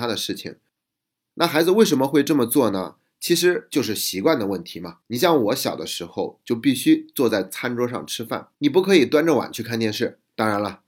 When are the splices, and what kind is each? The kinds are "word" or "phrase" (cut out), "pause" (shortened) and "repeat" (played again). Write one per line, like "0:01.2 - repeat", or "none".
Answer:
0:05.0 - pause
0:08.5 - pause